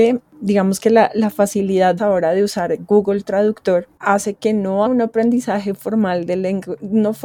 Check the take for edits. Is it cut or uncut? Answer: cut